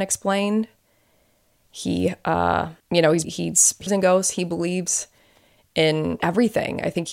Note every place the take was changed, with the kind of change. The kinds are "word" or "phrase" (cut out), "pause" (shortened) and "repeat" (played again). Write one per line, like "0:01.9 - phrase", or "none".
0:02.8 - pause
0:03.2 - phrase
0:03.9 - word
0:06.2 - word

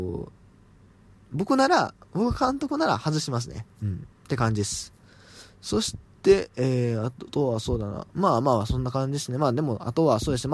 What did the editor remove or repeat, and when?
0:03.7 - pause
0:04.1 - pause
0:08.1 - pause

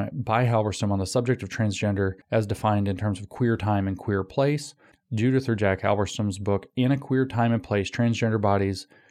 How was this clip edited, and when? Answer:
0:02.2 - pause
0:04.9 - pause

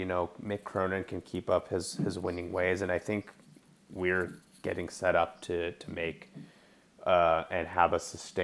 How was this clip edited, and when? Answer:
none

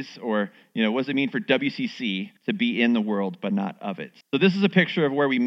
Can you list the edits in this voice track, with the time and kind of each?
0:02.4 - pause
0:04.2 - pause

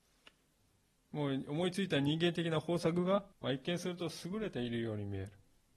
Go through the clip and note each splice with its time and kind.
0:03.3 - pause

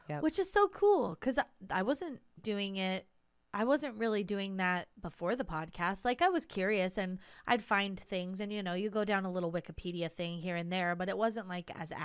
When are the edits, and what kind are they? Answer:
0:02.4 - word

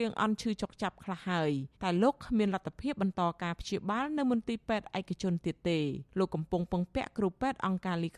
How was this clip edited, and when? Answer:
0:01.7 - pause
0:06.1 - pause

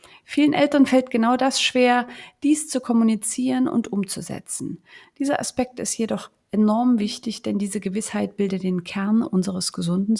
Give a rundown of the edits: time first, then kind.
none

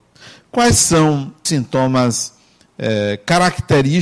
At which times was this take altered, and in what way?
0:01.5 - word

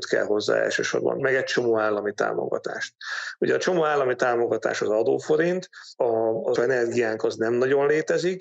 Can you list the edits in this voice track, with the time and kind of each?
0:01.2 - word
0:06.6 - word

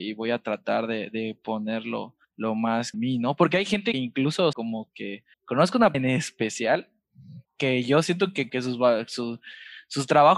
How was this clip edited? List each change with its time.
0:02.2 - pause
0:02.9 - phrase
0:03.9 - word
0:04.5 - word
0:05.3 - pause
0:05.9 - word
0:07.4 - pause
0:08.5 - word

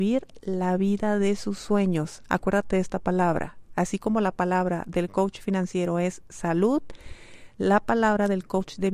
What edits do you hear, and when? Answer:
none

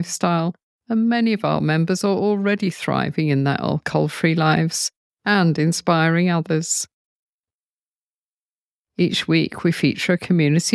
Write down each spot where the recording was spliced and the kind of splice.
none

